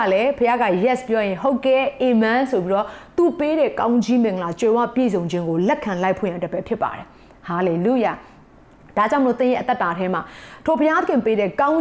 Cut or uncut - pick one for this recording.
uncut